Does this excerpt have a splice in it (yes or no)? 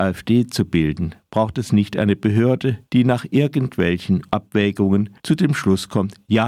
yes